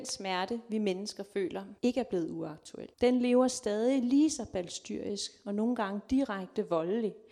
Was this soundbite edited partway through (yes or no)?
yes